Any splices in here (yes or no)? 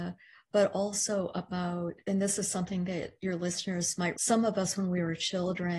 yes